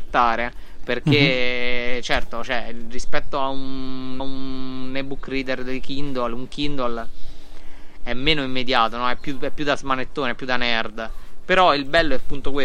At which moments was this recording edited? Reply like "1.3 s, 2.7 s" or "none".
4.2 s